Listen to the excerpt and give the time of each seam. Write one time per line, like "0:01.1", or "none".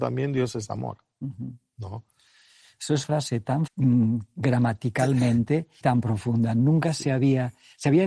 0:03.0
0:03.7
0:05.8